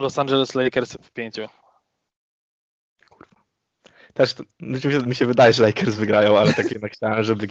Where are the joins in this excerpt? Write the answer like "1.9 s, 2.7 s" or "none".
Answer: none